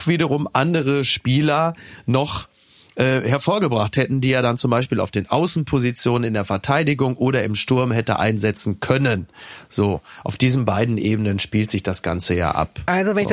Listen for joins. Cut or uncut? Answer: uncut